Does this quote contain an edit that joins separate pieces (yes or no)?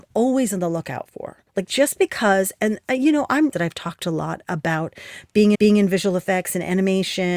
yes